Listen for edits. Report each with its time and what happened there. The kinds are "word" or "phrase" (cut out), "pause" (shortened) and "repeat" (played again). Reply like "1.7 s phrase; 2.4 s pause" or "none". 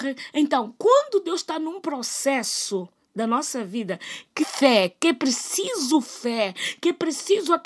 4.4 s word